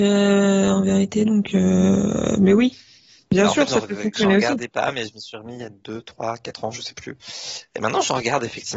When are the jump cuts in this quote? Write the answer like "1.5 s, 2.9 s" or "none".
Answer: none

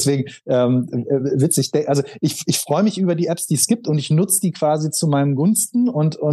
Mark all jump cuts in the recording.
none

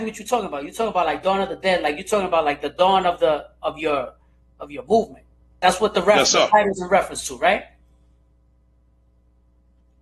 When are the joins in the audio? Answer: none

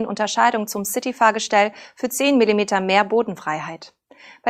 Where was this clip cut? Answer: none

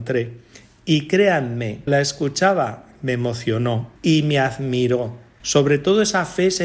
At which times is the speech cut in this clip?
1.9 s, 4.0 s, 5.4 s

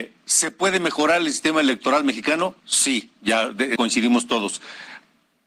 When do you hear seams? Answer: 2.6 s, 3.8 s

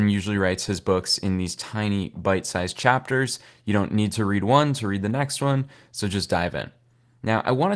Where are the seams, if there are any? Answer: none

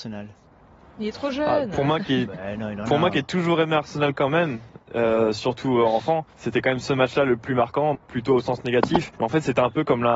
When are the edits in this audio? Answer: 6.3 s, 7.9 s, 9.2 s

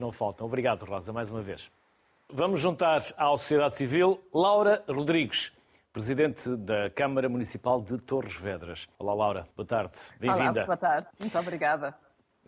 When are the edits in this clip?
8.9 s, 9.5 s, 11.1 s

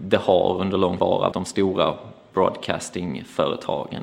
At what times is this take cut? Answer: 1.0 s, 1.3 s

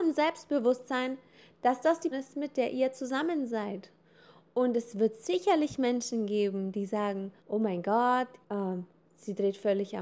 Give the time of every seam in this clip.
2.1 s, 7.4 s, 8.4 s

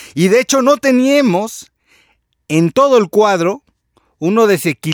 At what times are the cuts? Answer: none

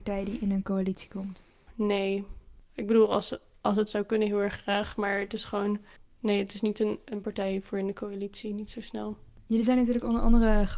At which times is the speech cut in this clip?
none

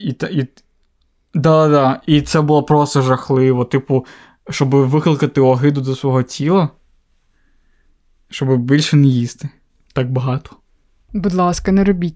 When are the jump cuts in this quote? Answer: none

